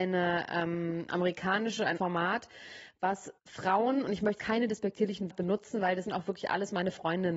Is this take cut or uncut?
cut